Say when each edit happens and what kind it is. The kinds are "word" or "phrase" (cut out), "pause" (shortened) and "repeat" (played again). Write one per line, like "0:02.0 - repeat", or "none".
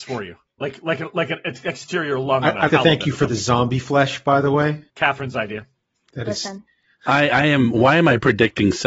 0:02.7 - word
0:04.9 - pause